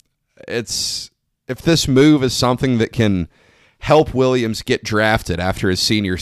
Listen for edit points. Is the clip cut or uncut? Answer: uncut